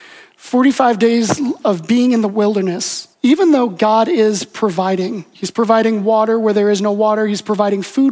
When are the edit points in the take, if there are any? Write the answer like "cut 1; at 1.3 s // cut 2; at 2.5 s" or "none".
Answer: cut 1; at 3.1 s

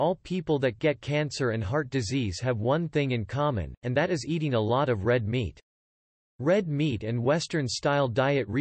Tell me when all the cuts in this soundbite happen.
none

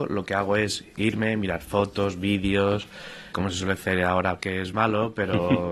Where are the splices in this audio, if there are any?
cut 1; at 3.3 s // cut 2; at 4.4 s // cut 3; at 4.7 s

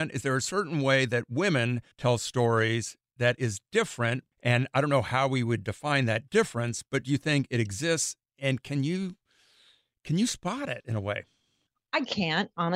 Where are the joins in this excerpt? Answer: cut 1; at 1.9 s // cut 2; at 4.3 s

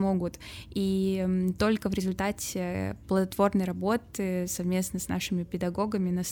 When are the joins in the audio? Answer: none

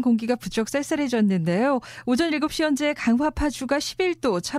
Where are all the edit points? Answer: none

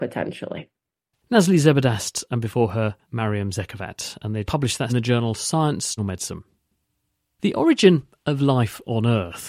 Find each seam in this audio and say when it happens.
cut 1; at 3.0 s // cut 2; at 4.4 s // cut 3; at 4.9 s // cut 4; at 6.0 s

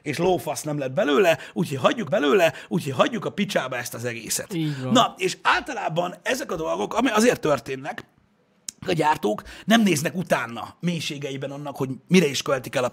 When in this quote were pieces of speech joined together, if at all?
cut 1; at 2.1 s // cut 2; at 8.8 s

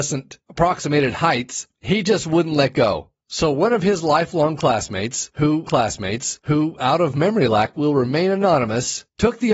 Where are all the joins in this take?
cut 1; at 5.7 s

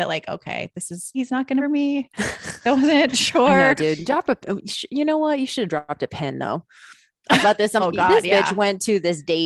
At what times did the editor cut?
cut 1; at 1.1 s // cut 2; at 1.6 s // cut 3; at 7.4 s // cut 4; at 7.8 s

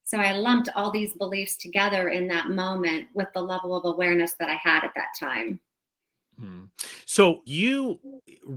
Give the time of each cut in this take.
cut 1; at 7.5 s

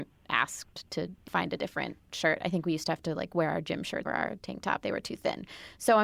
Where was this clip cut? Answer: cut 1; at 1.3 s // cut 2; at 4.1 s // cut 3; at 4.8 s

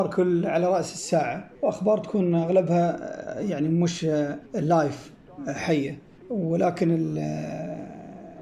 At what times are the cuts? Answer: cut 1; at 1.5 s // cut 2; at 4.5 s // cut 3; at 6.2 s

